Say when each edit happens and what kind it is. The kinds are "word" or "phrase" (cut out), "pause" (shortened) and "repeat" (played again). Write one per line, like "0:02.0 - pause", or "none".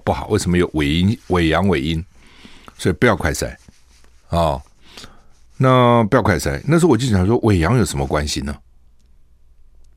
none